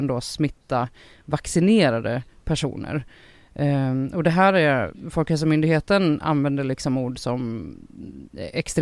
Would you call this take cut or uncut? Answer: uncut